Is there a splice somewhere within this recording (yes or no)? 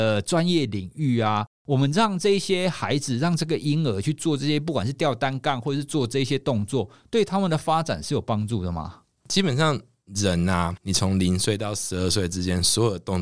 yes